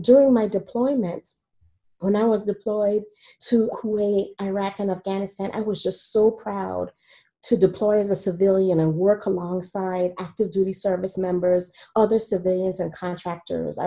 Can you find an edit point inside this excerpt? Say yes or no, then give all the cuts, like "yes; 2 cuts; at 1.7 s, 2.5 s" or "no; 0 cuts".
yes; 1 cut; at 3.7 s